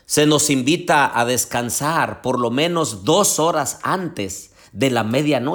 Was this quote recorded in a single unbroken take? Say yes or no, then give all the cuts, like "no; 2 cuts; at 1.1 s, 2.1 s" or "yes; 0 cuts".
yes; 0 cuts